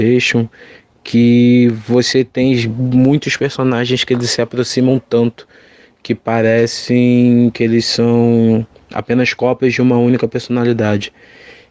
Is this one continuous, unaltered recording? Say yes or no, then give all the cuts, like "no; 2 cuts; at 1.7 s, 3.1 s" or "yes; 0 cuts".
yes; 0 cuts